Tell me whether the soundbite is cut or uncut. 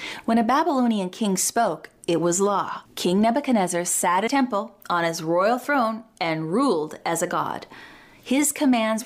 cut